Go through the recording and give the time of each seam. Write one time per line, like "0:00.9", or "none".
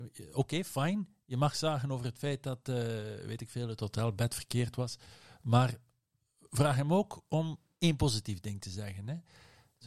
none